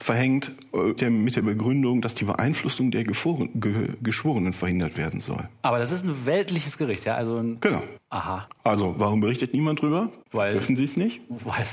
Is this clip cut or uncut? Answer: cut